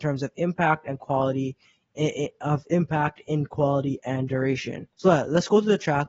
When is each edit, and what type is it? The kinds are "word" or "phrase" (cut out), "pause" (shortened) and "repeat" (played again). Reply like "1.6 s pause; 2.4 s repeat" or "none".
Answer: 4.9 s pause